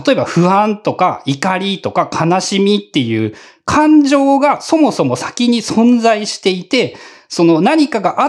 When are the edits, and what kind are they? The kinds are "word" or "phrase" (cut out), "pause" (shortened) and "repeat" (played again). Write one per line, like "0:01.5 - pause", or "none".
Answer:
none